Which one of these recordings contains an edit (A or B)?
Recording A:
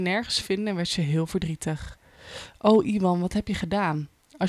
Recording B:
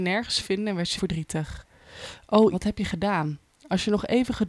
B